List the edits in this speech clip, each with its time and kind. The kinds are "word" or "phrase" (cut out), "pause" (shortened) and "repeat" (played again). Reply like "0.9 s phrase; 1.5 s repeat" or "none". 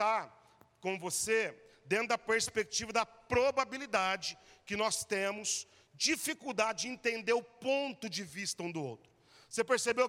none